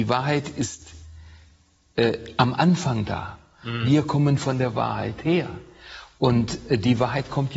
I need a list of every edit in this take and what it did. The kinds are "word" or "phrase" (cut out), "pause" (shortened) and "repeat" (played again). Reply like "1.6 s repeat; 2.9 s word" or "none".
none